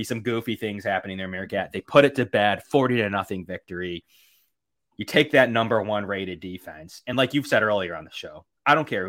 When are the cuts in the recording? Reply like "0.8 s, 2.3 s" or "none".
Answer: none

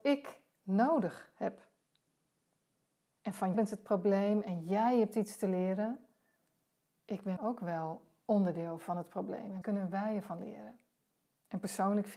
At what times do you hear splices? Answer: 3.5 s, 7.0 s, 7.4 s, 9.6 s

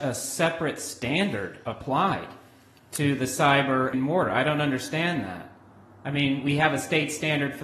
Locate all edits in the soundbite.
3.9 s

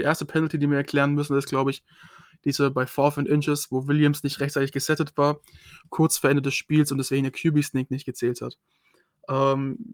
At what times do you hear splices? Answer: none

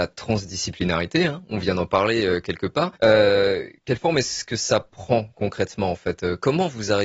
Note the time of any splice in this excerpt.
3.0 s

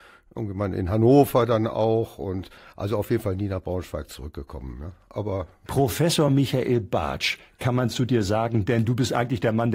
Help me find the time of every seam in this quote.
none

